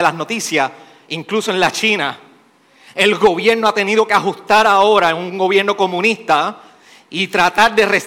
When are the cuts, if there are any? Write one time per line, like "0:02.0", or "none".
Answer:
none